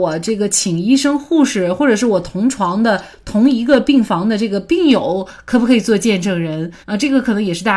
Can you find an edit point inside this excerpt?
yes; 1 cut; at 6.8 s

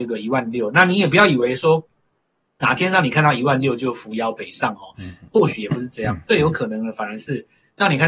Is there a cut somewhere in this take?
no; 0 cuts

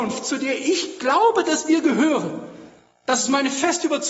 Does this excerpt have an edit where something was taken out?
no; 0 cuts

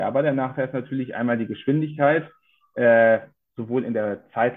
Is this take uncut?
yes; 0 cuts

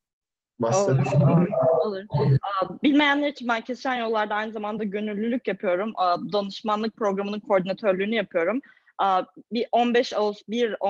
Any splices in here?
no; 0 cuts

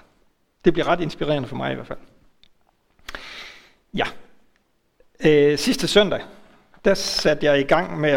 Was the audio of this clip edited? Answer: no; 0 cuts

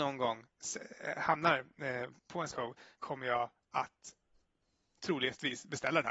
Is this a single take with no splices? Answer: no; 3 cuts; at 2.2 s, 2.5 s, 3.0 s

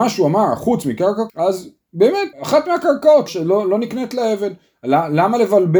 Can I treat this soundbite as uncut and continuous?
no; 3 cuts; at 1.3 s, 2.3 s, 3.3 s

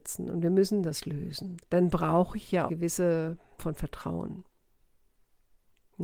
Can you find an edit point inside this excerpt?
yes; 2 cuts; at 2.7 s, 3.6 s

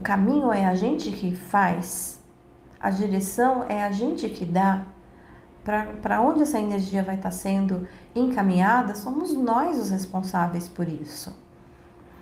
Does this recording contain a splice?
no; 0 cuts

